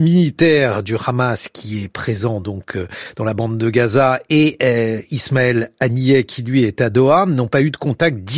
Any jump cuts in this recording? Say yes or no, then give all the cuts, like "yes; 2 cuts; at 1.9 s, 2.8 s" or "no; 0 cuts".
no; 0 cuts